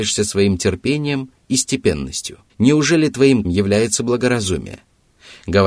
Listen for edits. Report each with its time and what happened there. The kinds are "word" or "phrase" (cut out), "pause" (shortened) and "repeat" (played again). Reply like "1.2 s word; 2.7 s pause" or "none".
2.5 s pause; 3.4 s word